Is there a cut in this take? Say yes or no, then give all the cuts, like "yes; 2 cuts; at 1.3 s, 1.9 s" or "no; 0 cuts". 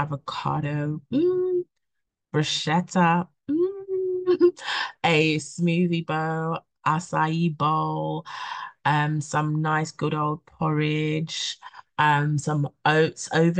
no; 0 cuts